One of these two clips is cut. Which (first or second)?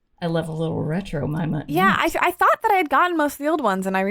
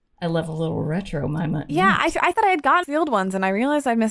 second